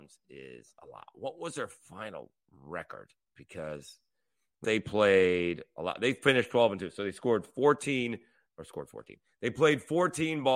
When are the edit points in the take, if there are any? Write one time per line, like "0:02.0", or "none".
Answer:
0:04.6